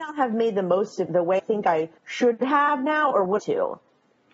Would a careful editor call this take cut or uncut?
cut